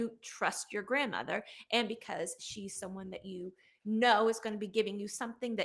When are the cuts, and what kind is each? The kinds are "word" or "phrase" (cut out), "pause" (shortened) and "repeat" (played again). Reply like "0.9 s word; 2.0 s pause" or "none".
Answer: none

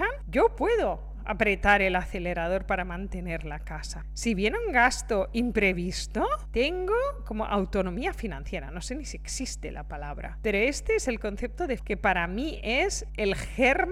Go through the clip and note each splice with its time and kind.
11.8 s word

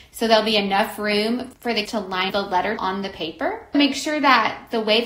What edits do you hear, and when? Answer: 1.9 s word; 2.3 s word; 2.8 s word; 3.7 s word

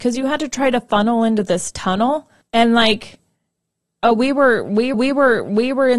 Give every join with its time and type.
2.4 s pause; 4.9 s repeat

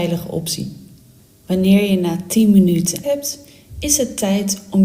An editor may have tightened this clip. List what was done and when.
3.0 s phrase

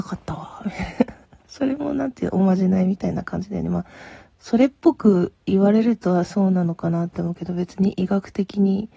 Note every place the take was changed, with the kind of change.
none

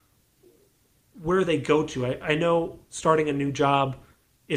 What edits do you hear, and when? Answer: none

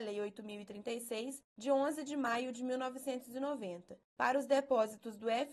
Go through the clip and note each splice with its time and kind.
none

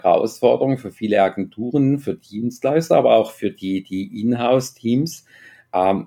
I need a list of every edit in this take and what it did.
none

